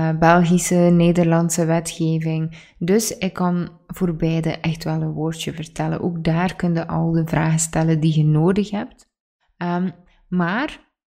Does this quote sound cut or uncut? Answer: uncut